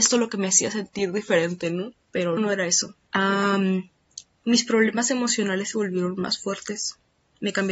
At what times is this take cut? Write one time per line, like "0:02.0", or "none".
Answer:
0:02.4